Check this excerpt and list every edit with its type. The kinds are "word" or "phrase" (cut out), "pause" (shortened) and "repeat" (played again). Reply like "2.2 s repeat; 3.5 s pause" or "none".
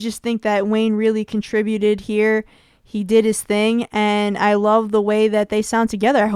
none